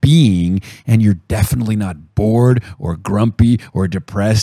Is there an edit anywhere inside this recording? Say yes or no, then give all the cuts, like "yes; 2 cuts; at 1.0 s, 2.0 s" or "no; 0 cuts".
no; 0 cuts